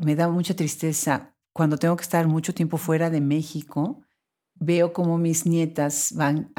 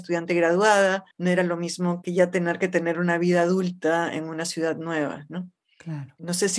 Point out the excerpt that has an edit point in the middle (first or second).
second